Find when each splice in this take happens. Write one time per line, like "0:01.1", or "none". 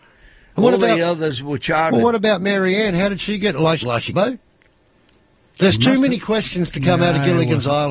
0:03.8
0:04.1